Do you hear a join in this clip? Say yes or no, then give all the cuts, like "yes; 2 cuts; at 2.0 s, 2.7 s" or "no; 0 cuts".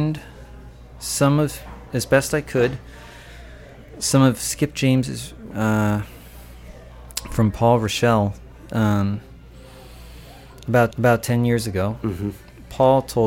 yes; 2 cuts; at 5.5 s, 10.9 s